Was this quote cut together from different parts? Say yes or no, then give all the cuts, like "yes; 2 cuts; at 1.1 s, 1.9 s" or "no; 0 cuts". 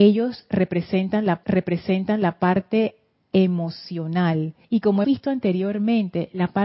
yes; 3 cuts; at 1.4 s, 4.6 s, 5.0 s